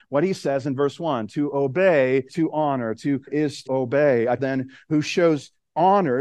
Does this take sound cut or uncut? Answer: cut